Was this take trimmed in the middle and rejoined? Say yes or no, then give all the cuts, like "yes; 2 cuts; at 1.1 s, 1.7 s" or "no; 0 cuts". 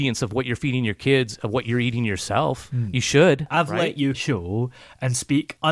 yes; 1 cut; at 4.1 s